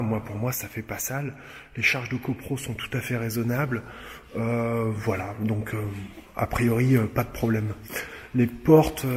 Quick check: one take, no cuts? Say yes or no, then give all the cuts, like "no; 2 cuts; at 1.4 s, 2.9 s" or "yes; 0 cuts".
yes; 0 cuts